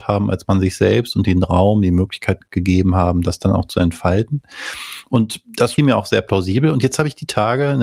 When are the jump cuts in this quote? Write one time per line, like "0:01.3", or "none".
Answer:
0:05.8